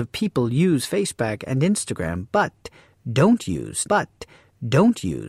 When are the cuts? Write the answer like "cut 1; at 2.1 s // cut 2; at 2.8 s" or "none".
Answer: cut 1; at 3.8 s